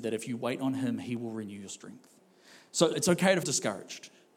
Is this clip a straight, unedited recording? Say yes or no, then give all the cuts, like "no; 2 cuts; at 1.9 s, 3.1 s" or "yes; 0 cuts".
no; 2 cuts; at 2.9 s, 3.4 s